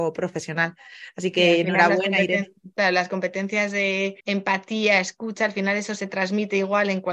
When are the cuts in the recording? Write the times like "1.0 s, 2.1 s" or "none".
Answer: 4.2 s